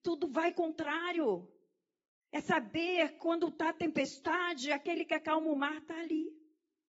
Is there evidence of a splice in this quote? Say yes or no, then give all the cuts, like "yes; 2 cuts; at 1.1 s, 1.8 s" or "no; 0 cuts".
no; 0 cuts